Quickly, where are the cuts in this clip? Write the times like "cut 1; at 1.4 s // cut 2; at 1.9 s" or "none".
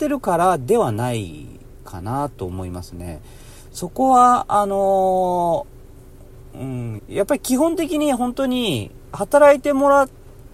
cut 1; at 7.0 s

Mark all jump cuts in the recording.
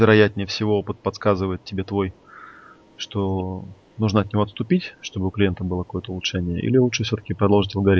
none

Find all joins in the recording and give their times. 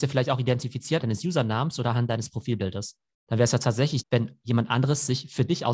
cut 1; at 1.0 s // cut 2; at 4.0 s

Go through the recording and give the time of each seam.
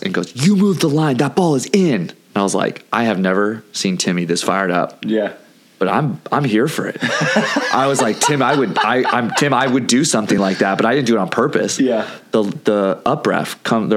none

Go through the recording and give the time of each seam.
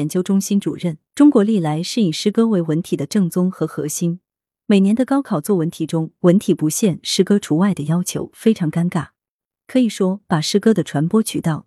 cut 1; at 1.1 s

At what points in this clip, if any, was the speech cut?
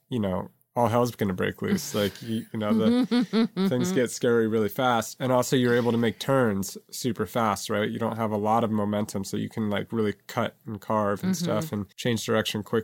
cut 1; at 11.9 s

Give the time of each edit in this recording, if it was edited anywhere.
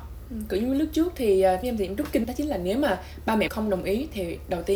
cut 1; at 1.6 s // cut 2; at 2.2 s // cut 3; at 3.5 s

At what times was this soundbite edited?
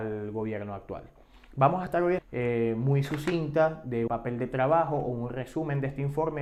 cut 1; at 2.2 s // cut 2; at 4.1 s

